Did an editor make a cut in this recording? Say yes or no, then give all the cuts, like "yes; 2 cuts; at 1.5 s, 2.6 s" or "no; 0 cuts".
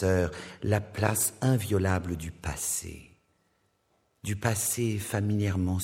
no; 0 cuts